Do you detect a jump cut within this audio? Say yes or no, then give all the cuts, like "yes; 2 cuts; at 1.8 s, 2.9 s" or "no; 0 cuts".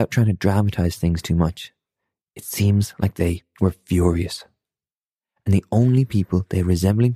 no; 0 cuts